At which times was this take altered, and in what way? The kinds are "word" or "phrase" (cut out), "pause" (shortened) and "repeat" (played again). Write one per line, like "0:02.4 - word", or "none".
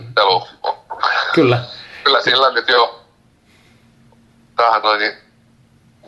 0:04.8 - word